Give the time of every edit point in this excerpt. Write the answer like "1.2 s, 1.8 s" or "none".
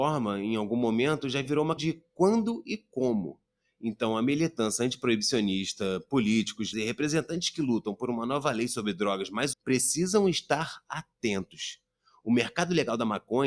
1.8 s, 6.7 s, 9.5 s